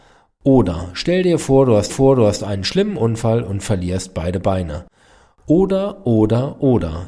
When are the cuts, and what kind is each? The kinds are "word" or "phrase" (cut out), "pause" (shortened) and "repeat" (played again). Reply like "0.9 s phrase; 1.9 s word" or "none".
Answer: 1.9 s repeat